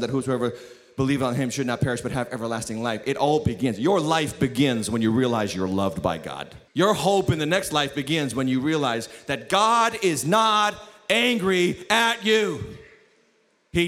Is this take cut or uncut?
cut